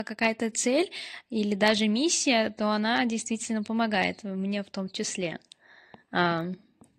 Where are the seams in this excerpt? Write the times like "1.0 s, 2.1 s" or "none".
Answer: none